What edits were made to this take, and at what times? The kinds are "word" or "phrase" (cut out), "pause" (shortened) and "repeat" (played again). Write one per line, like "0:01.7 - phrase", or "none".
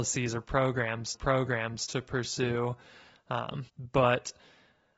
0:01.1 - repeat
0:03.7 - pause

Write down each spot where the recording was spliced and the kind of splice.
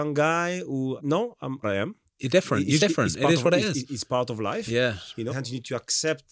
0:01.0 - word
0:01.6 - phrase
0:02.1 - pause
0:02.8 - word
0:05.3 - word

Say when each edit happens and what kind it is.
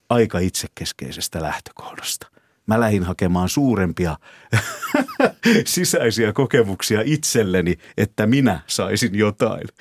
none

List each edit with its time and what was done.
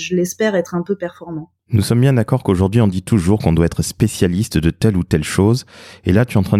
0:01.6 - pause

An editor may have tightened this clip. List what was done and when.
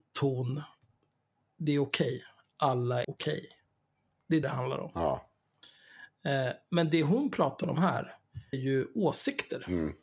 0:03.0 - word
0:04.4 - word
0:08.5 - word

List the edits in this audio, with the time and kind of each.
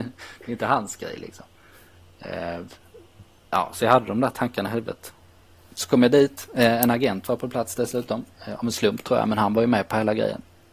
none

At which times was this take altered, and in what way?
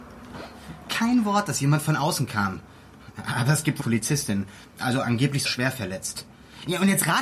0:03.8 - phrase
0:05.4 - word

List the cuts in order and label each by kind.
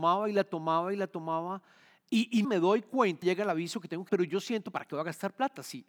0:02.4 - word
0:03.2 - phrase
0:04.1 - word

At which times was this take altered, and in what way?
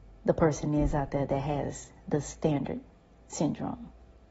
none

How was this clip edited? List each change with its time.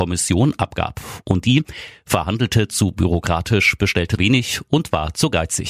0:04.2 - word

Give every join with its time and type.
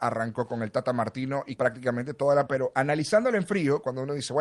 0:01.6 - word
0:02.5 - word

